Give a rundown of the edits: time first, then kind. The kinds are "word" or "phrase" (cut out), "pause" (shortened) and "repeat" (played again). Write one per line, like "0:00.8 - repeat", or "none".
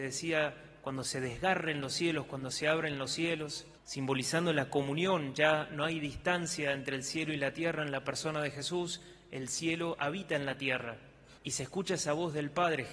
0:03.8 - pause
0:11.4 - pause